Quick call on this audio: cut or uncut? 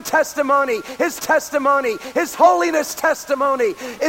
cut